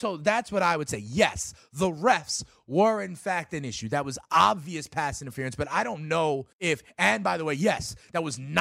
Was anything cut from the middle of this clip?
yes; 1 cut; at 6.5 s

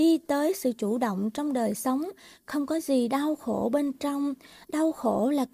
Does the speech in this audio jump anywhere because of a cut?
no; 0 cuts

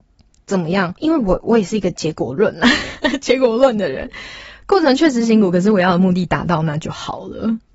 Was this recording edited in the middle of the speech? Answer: yes; 1 cut; at 1.0 s

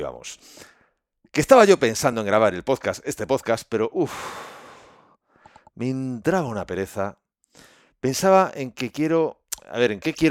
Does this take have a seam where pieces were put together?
no; 0 cuts

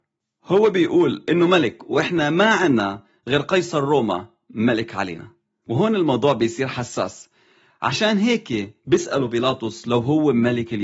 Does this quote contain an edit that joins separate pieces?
no; 0 cuts

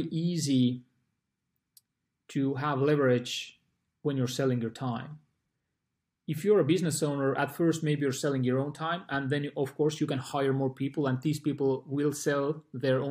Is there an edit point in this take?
no; 0 cuts

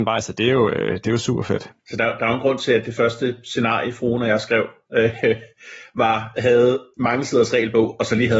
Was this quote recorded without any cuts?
no; 2 cuts; at 1.8 s, 6.4 s

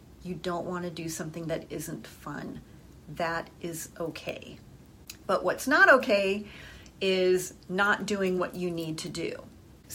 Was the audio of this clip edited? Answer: no; 0 cuts

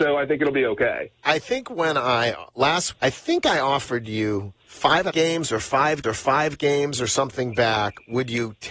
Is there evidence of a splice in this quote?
yes; 4 cuts; at 2.9 s, 4.6 s, 5.1 s, 6.0 s

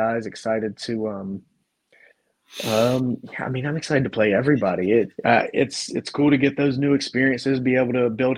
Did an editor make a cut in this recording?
yes; 1 cut; at 5.2 s

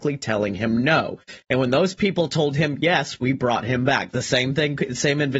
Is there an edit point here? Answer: no; 0 cuts

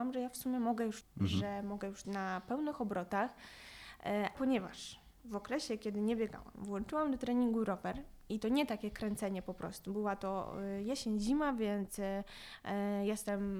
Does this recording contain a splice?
yes; 3 cuts; at 1.0 s, 2.0 s, 4.3 s

